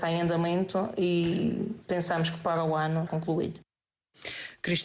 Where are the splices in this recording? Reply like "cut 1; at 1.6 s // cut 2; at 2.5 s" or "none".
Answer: cut 1; at 3.1 s